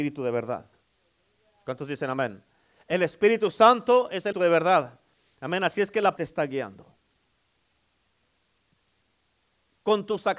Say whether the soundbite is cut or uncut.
cut